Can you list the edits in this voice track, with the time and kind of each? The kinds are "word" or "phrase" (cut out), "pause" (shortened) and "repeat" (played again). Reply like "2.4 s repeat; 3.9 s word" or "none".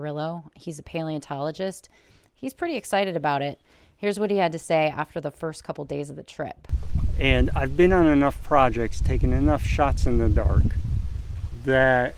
none